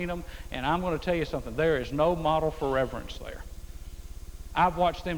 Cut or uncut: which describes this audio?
uncut